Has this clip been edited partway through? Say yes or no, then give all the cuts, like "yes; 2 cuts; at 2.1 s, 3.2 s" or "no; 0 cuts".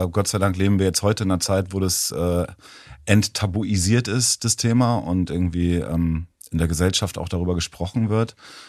no; 0 cuts